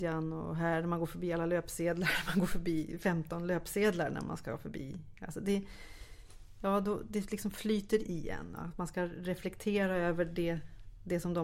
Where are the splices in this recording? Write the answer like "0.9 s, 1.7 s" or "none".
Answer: 8.0 s